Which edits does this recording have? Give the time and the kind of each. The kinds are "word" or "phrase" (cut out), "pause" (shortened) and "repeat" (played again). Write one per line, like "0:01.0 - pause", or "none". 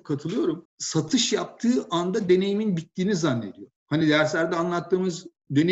none